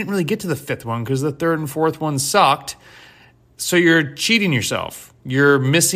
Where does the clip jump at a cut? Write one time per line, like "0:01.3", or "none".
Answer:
none